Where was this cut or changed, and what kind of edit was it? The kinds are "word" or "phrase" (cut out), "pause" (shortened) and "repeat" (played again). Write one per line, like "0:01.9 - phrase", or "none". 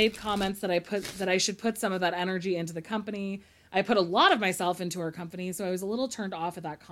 none

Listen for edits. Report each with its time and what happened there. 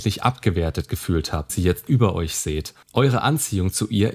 0:01.5 - word
0:01.9 - word
0:02.8 - pause

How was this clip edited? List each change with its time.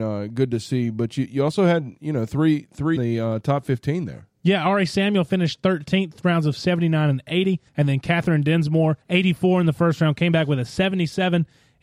0:03.0 - phrase
0:07.7 - pause
0:09.0 - pause

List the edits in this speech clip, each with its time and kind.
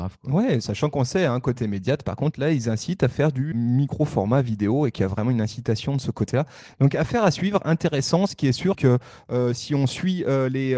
0:03.5 - word
0:08.7 - word

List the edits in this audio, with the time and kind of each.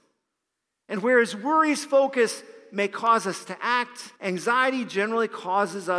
0:04.2 - pause

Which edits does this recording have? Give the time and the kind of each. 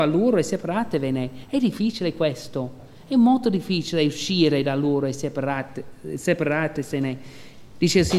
none

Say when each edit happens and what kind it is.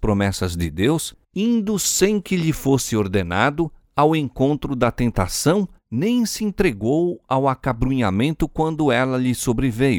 0:01.2 - pause
0:05.8 - pause

